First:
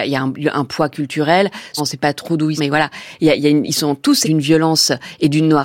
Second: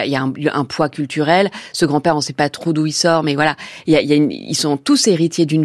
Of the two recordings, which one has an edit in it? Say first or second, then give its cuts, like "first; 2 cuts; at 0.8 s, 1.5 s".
first; 4 cuts; at 1.8 s, 2.6 s, 3.7 s, 4.2 s